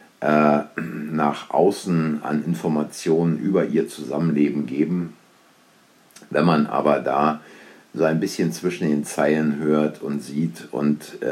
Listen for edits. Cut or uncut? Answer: uncut